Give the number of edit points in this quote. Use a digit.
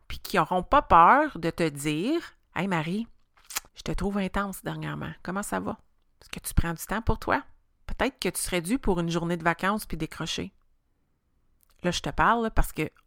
4